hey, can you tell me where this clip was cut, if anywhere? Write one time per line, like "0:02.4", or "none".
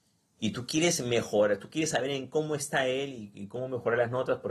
none